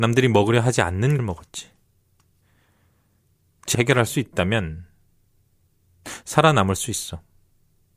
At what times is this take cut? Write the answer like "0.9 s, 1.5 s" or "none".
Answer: 1.2 s, 3.7 s